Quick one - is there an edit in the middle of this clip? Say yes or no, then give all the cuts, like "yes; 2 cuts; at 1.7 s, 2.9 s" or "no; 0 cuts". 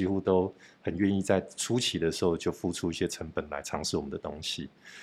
no; 0 cuts